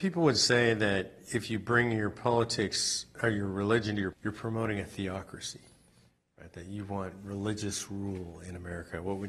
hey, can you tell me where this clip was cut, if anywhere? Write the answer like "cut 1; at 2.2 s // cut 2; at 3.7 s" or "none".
cut 1; at 4.1 s